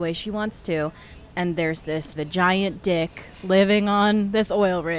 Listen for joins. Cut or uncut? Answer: cut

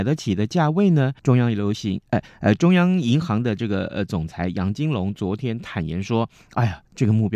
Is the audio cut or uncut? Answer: cut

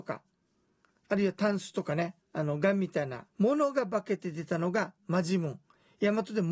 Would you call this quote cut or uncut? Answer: cut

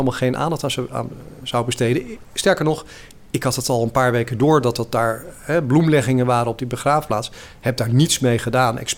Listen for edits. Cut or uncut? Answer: uncut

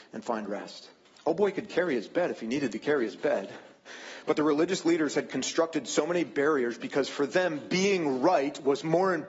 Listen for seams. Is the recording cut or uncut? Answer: cut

